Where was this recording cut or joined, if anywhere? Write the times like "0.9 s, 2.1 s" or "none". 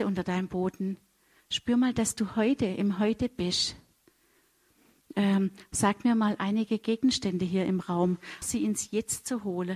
8.4 s